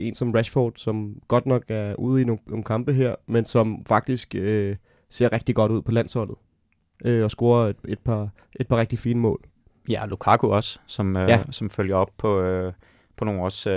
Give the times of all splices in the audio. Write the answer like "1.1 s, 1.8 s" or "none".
none